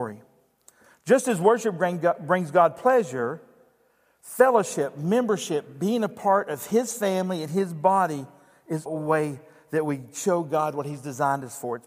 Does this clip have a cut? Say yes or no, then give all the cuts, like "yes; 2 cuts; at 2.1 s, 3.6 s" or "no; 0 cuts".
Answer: yes; 1 cut; at 8.9 s